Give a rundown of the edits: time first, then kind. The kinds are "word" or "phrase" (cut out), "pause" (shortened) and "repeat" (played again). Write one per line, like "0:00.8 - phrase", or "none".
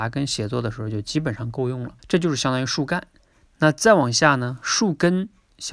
0:02.0 - pause